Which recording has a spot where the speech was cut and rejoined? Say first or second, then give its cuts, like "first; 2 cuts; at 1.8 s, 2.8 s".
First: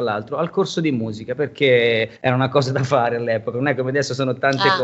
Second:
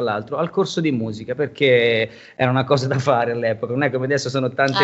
first; 1 cut; at 2.2 s